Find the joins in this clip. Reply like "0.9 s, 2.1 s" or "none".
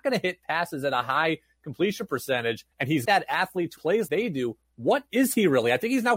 2.7 s, 3.1 s, 3.8 s, 4.1 s